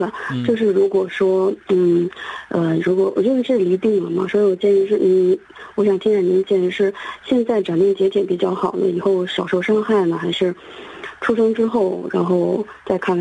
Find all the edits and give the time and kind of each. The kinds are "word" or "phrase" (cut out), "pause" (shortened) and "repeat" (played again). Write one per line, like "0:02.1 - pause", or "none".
none